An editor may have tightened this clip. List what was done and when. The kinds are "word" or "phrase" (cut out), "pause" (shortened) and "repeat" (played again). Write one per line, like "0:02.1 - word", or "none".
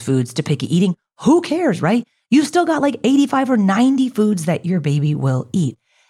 none